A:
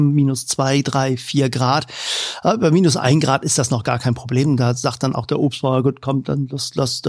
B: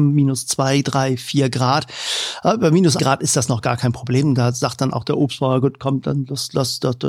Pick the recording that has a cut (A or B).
B